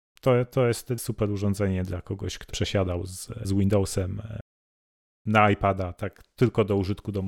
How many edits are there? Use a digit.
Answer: 3